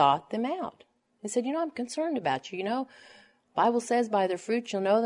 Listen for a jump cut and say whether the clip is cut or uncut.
uncut